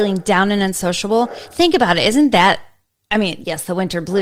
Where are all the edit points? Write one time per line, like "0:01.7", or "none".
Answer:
none

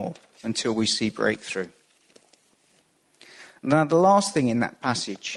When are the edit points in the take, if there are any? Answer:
none

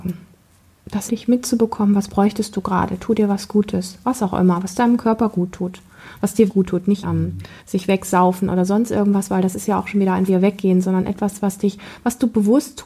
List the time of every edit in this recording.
0:01.1
0:06.5
0:07.0
0:07.6
0:10.3

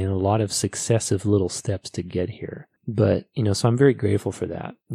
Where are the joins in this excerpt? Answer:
0:02.8

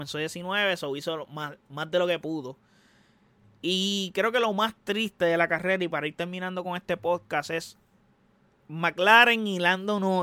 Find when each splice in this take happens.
none

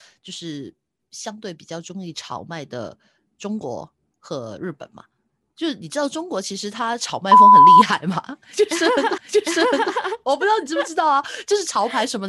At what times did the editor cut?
0:09.2

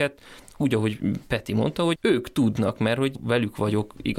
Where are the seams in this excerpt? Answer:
none

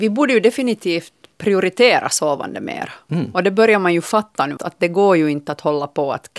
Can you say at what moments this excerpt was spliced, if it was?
0:04.6

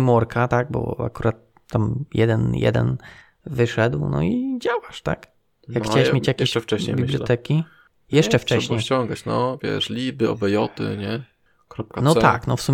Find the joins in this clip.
none

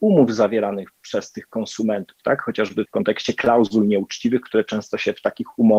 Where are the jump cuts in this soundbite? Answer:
0:02.8

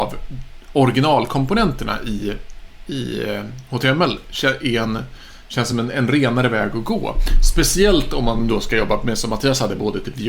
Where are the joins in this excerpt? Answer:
none

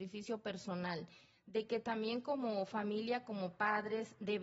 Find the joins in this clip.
none

